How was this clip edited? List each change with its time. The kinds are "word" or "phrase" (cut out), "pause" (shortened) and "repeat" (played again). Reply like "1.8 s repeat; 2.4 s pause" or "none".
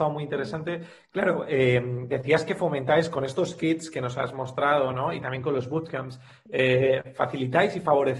none